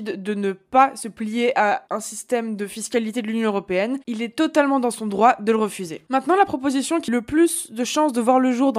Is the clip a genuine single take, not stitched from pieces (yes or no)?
no